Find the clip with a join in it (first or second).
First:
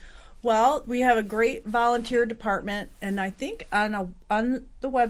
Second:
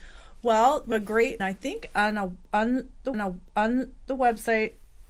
second